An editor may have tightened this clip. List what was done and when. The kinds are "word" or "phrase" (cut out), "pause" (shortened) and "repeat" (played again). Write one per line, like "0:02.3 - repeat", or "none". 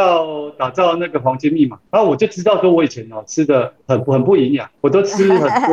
0:01.9 - pause
0:04.8 - pause